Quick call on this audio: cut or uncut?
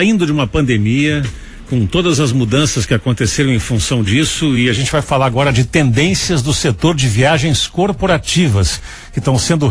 uncut